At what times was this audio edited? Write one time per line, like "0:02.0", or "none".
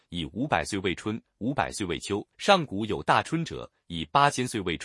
0:02.3

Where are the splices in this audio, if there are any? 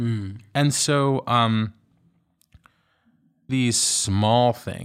0:03.5

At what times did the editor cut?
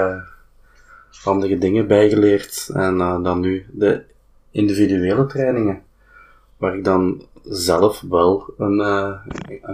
none

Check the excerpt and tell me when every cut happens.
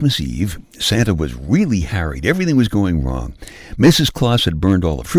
none

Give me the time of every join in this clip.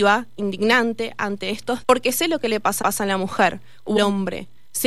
0:01.8
0:02.8
0:04.0

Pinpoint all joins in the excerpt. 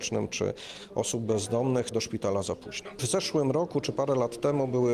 0:01.9

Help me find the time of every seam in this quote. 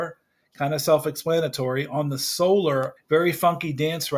0:03.0

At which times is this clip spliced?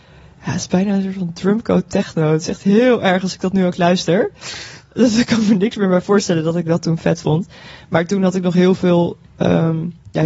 none

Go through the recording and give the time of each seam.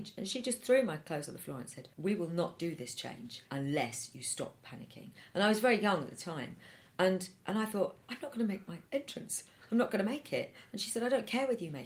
0:01.9
0:03.5
0:07.4
0:08.0
0:08.9

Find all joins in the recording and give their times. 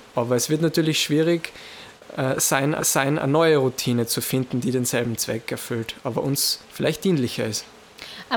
0:02.8
0:06.6

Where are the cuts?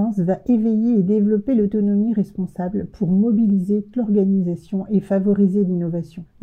0:03.9

